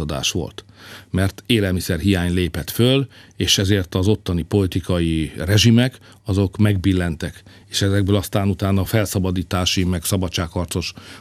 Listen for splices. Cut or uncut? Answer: uncut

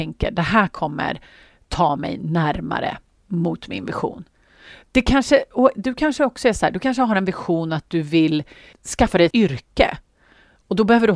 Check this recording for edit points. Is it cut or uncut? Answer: cut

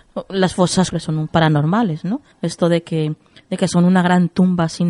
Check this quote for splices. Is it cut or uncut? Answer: cut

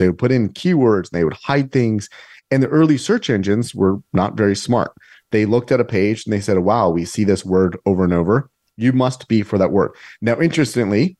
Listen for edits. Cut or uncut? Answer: uncut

